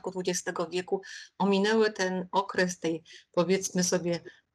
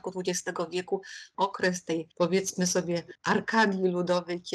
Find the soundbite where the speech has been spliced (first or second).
second